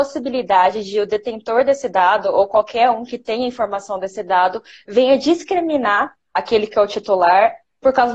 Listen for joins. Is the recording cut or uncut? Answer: uncut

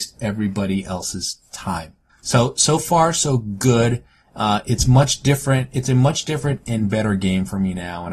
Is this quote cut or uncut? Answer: cut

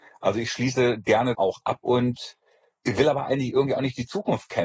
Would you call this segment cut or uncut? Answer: cut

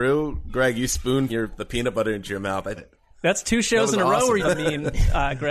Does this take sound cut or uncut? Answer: cut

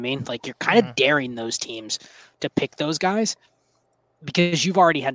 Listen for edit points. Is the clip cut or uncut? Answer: uncut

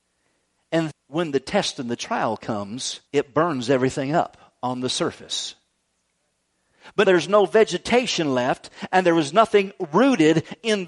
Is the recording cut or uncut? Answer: cut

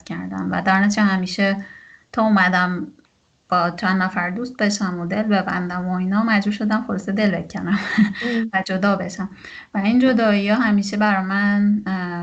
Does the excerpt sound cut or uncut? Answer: uncut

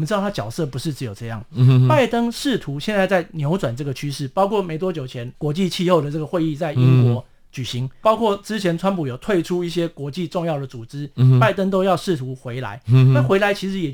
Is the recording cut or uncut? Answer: uncut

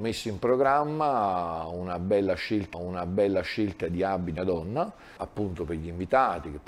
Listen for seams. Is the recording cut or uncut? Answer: cut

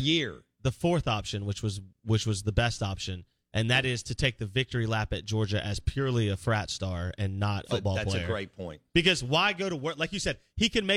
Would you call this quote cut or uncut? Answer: cut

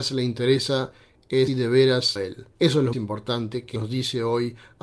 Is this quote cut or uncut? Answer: cut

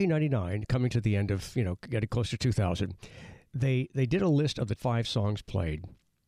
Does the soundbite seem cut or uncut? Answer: cut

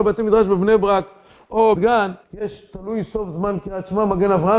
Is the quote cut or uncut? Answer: cut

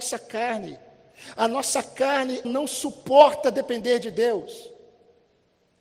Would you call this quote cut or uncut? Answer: cut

